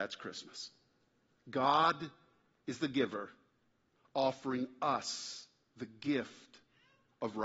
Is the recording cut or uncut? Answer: uncut